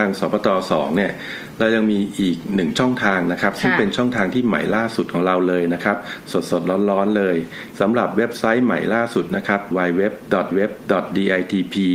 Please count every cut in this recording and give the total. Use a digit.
2